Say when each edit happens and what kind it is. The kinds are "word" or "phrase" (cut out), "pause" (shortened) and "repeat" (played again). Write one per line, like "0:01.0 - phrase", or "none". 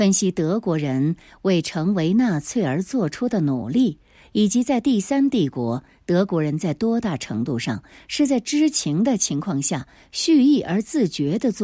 none